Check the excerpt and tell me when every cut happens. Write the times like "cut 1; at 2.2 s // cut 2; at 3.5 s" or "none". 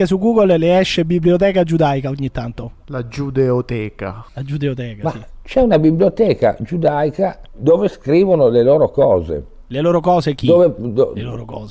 cut 1; at 4.3 s